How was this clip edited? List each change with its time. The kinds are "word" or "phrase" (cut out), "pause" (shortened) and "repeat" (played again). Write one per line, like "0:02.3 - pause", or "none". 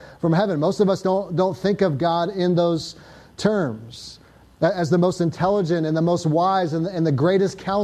none